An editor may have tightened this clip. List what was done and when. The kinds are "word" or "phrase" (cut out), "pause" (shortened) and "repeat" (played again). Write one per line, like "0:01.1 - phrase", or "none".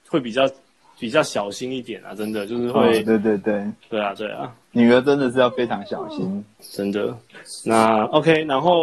0:04.6 - pause
0:06.6 - word

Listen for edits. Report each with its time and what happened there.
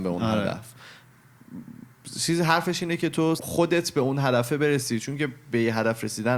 0:03.4 - phrase

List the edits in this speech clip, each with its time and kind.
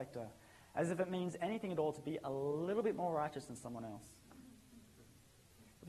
none

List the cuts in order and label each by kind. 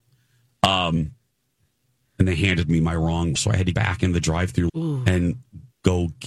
0:03.4 - word
0:03.7 - word
0:04.7 - word

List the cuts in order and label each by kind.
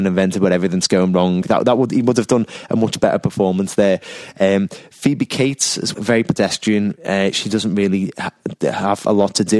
0:05.9 - word

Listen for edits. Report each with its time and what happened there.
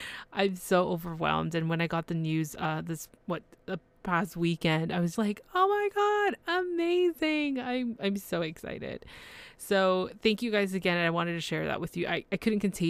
0:05.1 - word

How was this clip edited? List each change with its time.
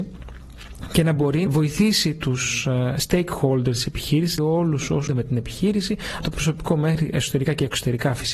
0:01.5 - word
0:04.4 - word
0:05.1 - word
0:06.2 - word

